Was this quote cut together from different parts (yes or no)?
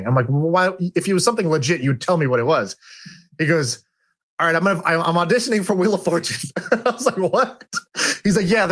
no